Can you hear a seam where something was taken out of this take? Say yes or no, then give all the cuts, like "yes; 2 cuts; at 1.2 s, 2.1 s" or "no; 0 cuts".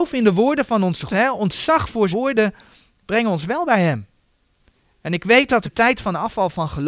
yes; 3 cuts; at 1.1 s, 2.1 s, 5.6 s